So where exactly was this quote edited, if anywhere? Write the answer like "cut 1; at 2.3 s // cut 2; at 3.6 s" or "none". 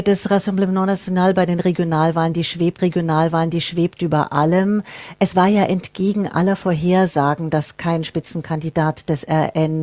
cut 1; at 2.8 s